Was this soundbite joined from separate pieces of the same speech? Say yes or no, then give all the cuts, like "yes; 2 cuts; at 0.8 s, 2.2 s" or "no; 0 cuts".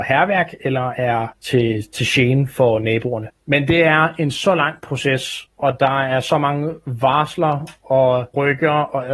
no; 0 cuts